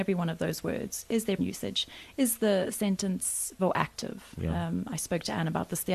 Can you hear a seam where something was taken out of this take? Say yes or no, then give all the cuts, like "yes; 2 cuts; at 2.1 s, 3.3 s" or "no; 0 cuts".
yes; 2 cuts; at 1.4 s, 3.6 s